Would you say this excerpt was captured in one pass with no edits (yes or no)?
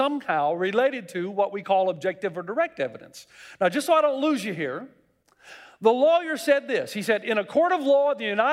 yes